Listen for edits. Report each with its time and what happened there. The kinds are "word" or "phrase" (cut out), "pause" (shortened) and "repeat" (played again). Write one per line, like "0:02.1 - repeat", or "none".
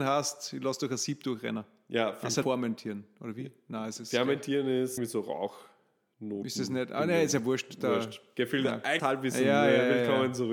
0:02.4 - word
0:05.0 - word
0:09.0 - word